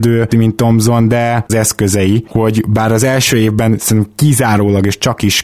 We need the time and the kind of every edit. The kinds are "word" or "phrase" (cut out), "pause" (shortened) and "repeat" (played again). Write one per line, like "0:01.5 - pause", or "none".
0:01.5 - phrase